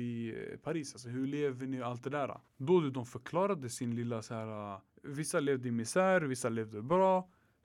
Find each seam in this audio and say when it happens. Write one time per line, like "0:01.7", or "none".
0:02.5
0:04.9